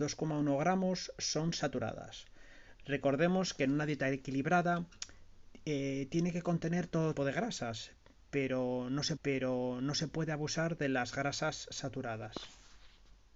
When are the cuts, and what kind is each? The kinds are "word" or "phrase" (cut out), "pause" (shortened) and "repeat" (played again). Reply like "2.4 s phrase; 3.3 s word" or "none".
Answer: 7.2 s word; 9.2 s repeat